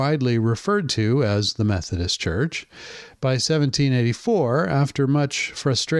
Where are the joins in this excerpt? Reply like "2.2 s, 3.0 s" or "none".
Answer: none